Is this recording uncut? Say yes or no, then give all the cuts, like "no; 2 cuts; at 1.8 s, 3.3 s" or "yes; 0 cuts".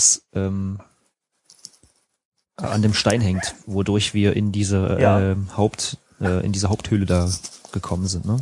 yes; 0 cuts